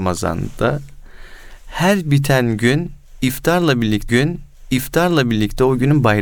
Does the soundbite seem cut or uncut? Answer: cut